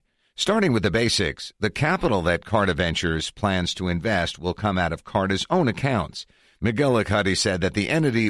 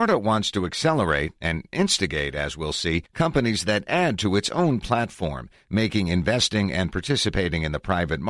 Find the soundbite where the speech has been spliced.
second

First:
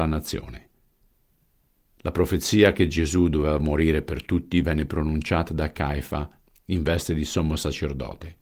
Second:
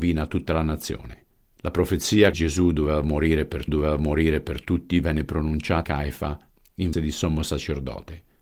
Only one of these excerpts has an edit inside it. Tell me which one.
second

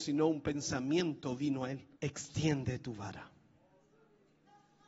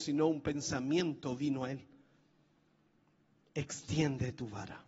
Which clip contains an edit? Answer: first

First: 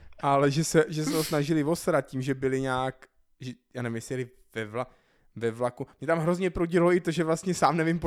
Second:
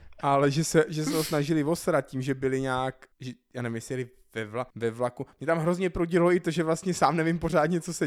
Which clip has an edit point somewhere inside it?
second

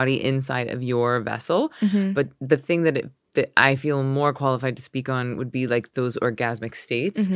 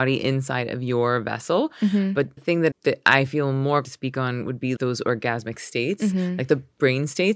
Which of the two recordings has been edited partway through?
second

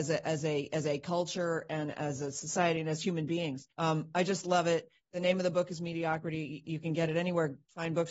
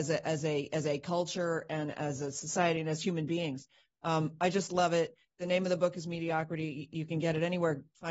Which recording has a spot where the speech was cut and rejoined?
first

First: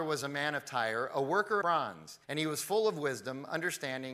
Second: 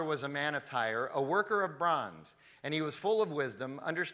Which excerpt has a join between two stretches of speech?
first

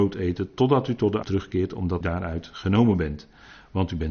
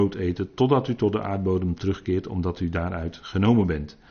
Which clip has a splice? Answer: first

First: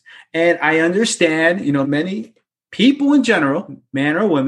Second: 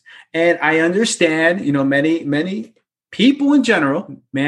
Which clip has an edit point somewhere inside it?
first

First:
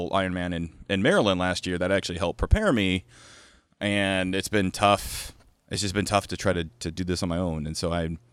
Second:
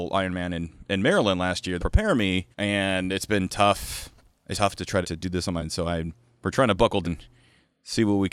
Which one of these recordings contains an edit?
second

